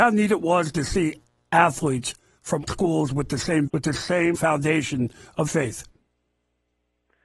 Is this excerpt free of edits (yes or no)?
no